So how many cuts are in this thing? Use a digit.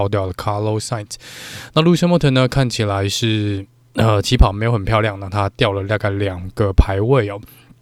0